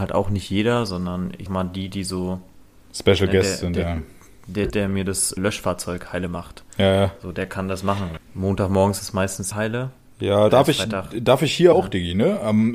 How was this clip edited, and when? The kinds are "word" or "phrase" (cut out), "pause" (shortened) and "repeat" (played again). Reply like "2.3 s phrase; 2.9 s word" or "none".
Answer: 1.5 s word; 4.7 s word; 5.4 s word; 8.2 s word; 9.0 s word; 9.5 s word; 10.5 s word; 11.7 s word

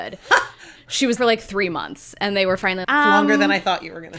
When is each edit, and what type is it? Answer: 1.2 s word; 2.8 s word

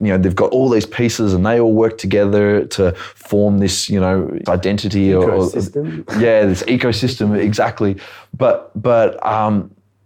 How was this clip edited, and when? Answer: 2.7 s word; 4.5 s word

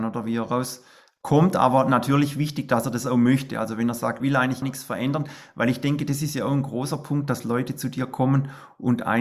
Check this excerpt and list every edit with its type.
4.2 s phrase; 4.6 s word

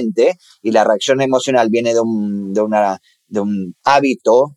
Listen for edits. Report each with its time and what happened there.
none

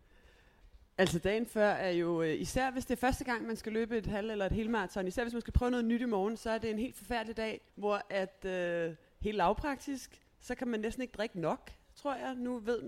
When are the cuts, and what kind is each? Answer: 7.7 s pause

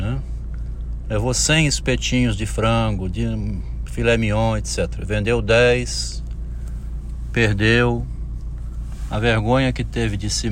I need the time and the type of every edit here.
none

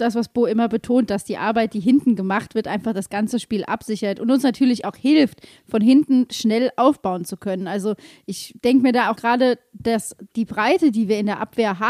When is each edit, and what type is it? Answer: 9.1 s word

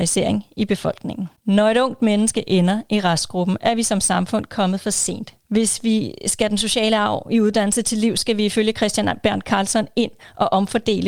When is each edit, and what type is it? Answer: 1.4 s pause; 5.4 s pause

